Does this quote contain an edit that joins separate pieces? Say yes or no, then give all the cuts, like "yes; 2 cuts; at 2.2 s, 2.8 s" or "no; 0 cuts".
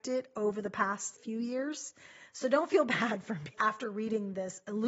yes; 1 cut; at 3.5 s